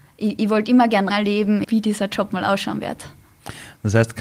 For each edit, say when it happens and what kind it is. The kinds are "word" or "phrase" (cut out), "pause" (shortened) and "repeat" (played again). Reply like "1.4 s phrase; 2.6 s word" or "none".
1.1 s phrase; 1.6 s phrase